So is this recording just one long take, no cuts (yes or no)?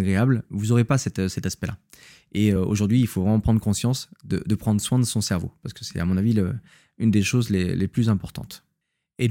yes